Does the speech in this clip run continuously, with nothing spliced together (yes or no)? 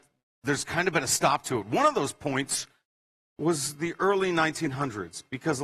yes